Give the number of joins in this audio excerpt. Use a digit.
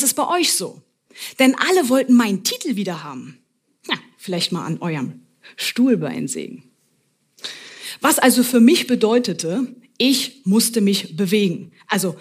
0